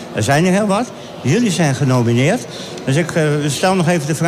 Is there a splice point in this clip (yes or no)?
no